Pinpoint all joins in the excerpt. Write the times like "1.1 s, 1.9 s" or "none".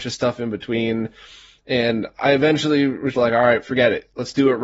3.1 s